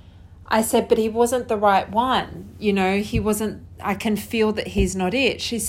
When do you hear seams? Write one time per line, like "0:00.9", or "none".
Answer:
none